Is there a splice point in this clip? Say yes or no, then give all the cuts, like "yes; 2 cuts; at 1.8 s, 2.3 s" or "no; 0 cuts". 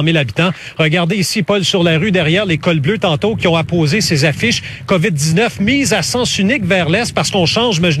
no; 0 cuts